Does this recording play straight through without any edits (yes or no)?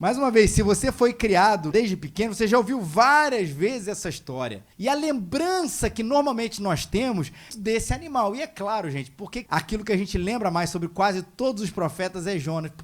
no